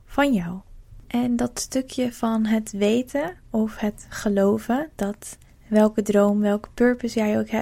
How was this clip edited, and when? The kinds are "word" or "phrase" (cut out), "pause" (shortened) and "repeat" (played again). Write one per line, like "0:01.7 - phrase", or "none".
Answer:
0:01.0 - pause
0:05.4 - pause

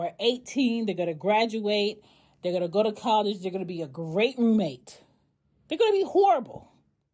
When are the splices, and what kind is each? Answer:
none

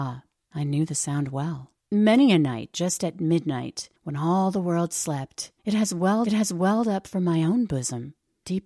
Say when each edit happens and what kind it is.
0:01.8 - pause
0:05.6 - pause
0:06.2 - repeat

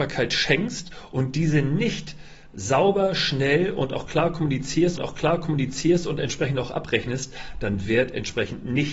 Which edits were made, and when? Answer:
0:05.0 - repeat
0:07.9 - phrase

